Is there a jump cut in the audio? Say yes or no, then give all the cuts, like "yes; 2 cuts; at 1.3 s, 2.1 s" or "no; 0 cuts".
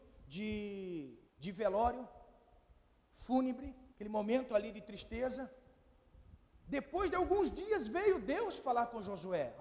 yes; 3 cuts; at 1.3 s, 3.9 s, 6.4 s